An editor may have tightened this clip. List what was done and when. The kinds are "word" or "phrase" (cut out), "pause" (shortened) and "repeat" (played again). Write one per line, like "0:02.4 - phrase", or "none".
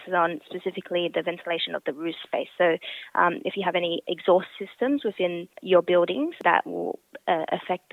0:05.5 - pause